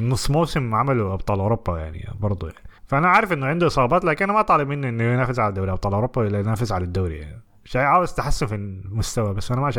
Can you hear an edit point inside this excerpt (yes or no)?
yes